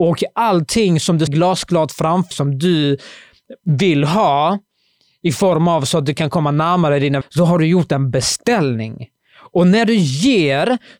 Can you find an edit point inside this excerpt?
yes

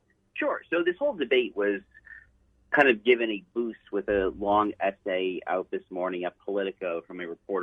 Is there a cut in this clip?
no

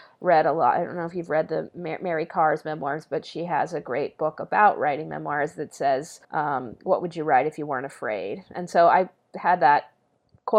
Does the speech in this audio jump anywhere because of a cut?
yes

